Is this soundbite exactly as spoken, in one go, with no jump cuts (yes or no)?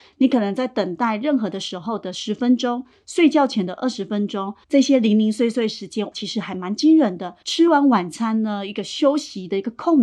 no